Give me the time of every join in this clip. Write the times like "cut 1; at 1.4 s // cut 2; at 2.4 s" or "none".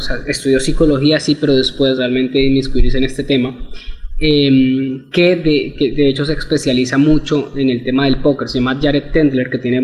none